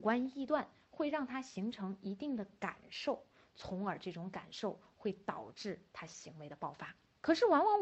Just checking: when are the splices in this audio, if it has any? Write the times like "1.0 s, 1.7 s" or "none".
none